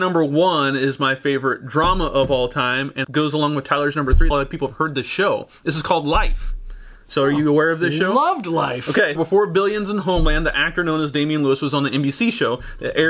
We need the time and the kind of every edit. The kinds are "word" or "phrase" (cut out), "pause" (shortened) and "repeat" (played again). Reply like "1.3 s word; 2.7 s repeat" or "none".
3.0 s word; 4.3 s phrase; 5.6 s pause; 9.2 s word

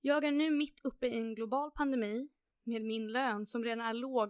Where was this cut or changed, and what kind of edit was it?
none

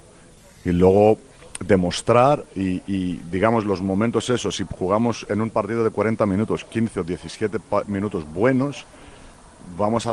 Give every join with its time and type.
7.8 s word

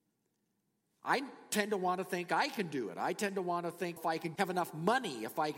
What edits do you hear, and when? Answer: 4.0 s word; 4.4 s word

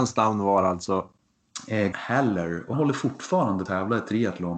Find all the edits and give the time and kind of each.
1.9 s word; 2.7 s word; 3.7 s phrase

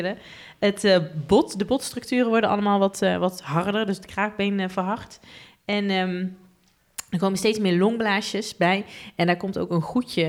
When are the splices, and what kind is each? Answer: none

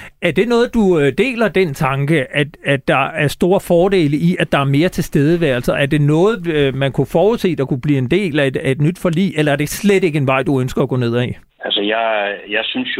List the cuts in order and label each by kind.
11.5 s pause

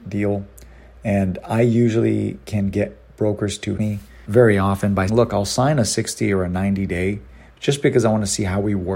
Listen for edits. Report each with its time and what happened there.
3.8 s word; 4.3 s word; 5.1 s word; 7.3 s pause

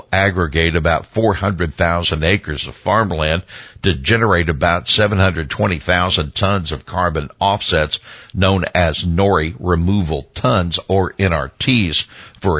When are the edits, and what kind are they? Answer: none

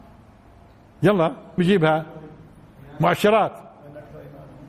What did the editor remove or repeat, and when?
1.6 s word

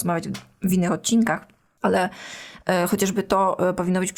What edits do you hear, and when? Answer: none

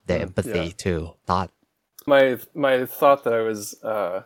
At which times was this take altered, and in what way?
1.2 s phrase; 2.1 s word

